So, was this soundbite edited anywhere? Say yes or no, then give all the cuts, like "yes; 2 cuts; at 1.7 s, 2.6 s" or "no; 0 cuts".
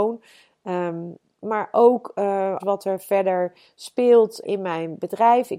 yes; 2 cuts; at 2.6 s, 4.4 s